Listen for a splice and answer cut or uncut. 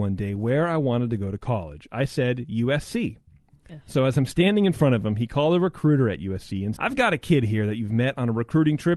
cut